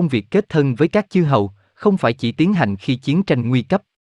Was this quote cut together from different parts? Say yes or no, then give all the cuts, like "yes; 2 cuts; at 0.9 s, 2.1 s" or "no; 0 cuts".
no; 0 cuts